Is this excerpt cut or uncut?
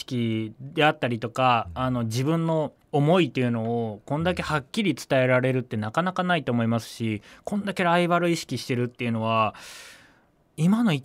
cut